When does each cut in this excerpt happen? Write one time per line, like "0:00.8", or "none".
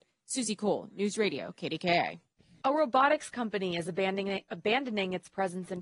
0:02.4

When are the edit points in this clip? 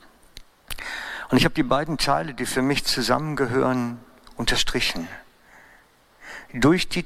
none

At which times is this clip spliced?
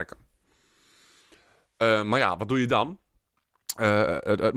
none

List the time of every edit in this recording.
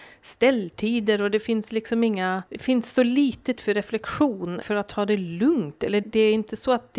0:02.5
0:03.6
0:04.6
0:06.0

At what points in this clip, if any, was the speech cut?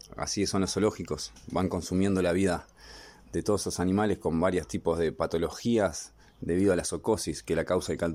none

